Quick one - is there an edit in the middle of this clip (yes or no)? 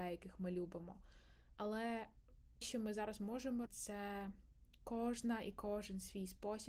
yes